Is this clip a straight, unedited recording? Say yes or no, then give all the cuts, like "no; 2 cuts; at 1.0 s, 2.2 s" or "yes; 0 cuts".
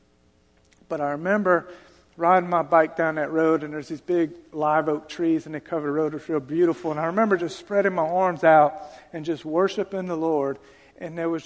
yes; 0 cuts